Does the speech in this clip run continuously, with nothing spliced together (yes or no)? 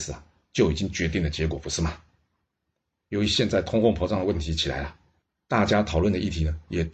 yes